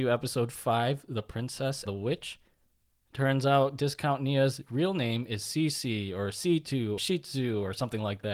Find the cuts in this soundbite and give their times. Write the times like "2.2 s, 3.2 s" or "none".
1.9 s, 7.0 s